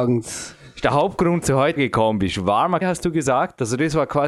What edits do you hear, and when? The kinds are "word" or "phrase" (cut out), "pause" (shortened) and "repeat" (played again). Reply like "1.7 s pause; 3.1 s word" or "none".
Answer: 1.4 s word; 1.8 s word; 2.8 s word